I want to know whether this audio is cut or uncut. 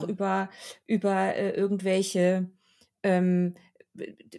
uncut